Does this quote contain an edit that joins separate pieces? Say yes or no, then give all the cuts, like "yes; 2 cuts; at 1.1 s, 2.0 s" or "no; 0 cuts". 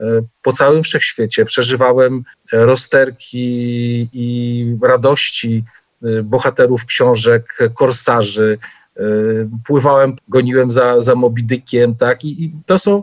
yes; 2 cuts; at 2.3 s, 10.2 s